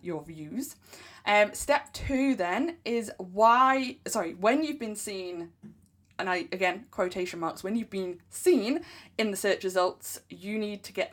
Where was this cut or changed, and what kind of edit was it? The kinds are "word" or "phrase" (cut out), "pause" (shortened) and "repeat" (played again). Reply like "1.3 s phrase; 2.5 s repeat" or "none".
none